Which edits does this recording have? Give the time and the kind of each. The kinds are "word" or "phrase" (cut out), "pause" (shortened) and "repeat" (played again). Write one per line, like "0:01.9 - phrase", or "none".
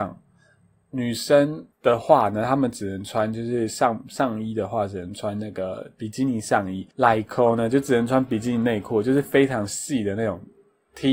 0:01.7 - pause
0:06.9 - pause